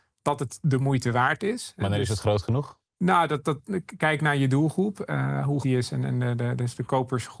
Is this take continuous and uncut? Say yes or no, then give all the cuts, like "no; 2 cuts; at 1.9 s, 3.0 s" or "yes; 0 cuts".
no; 2 cuts; at 2.9 s, 5.6 s